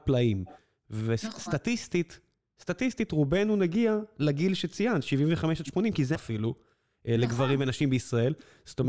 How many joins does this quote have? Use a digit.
1